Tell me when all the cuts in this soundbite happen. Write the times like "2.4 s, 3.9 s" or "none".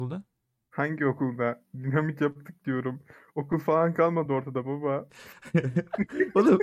none